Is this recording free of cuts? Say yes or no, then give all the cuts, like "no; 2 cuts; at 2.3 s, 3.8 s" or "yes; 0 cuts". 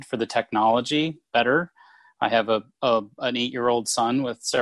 no; 1 cut; at 1.3 s